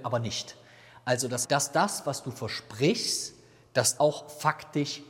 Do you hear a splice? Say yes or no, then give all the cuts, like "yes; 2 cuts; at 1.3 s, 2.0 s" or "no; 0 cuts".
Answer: yes; 2 cuts; at 1.4 s, 4.0 s